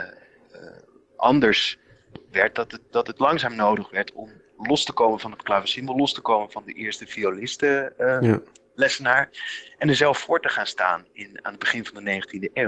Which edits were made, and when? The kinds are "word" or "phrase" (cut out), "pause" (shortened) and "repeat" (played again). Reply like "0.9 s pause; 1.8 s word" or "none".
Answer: none